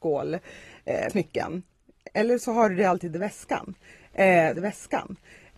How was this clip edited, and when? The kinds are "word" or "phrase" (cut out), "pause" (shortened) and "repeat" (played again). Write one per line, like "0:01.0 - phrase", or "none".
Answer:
0:01.1 - word
0:04.5 - repeat